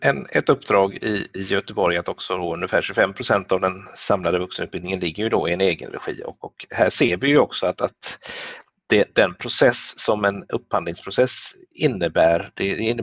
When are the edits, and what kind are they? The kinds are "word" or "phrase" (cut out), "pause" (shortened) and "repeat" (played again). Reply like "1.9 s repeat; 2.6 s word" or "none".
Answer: none